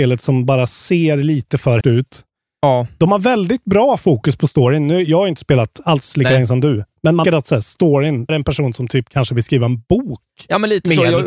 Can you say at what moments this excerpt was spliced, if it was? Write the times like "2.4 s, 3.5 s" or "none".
1.8 s, 7.2 s, 8.3 s

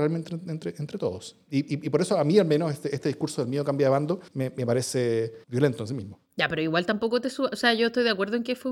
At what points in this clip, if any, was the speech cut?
4.3 s, 5.4 s, 6.3 s

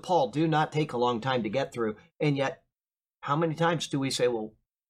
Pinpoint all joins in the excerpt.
none

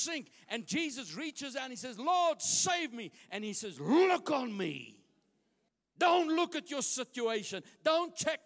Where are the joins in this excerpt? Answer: 5.7 s

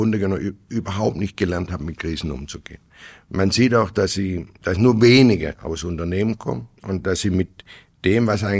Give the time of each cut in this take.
none

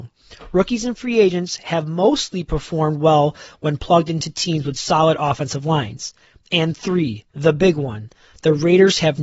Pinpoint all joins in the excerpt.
7.3 s

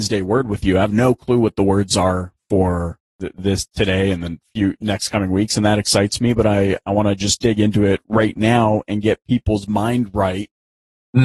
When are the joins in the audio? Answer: 3.1 s

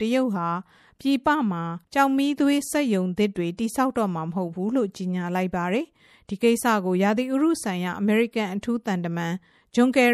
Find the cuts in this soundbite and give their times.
1.8 s

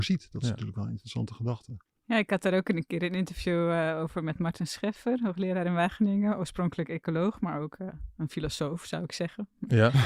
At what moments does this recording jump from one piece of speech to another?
none

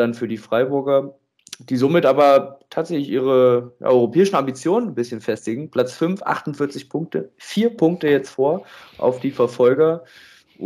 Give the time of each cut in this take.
none

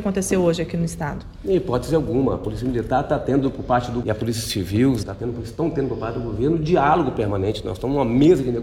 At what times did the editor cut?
4.0 s, 5.0 s

